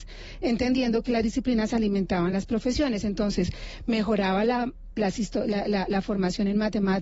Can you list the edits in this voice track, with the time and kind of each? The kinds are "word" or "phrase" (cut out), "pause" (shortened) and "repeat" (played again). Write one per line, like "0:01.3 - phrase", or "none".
none